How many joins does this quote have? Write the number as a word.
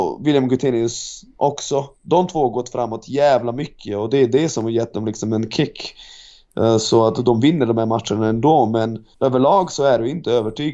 two